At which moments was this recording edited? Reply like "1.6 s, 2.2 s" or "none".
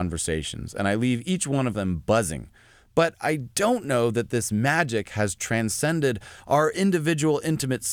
none